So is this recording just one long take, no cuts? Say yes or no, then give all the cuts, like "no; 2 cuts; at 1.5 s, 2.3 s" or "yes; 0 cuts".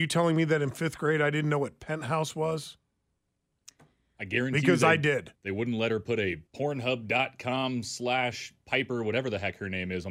no; 2 cuts; at 5.3 s, 6.5 s